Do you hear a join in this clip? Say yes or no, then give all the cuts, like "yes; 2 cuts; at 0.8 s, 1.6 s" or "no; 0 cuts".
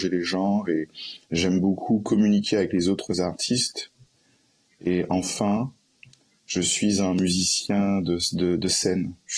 no; 0 cuts